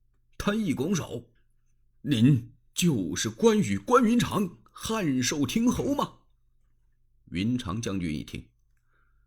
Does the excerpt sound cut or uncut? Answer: cut